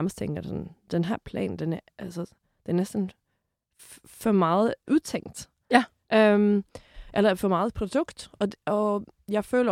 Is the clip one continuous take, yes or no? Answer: yes